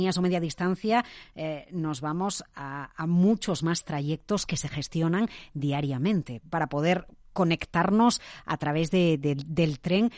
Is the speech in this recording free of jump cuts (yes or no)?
yes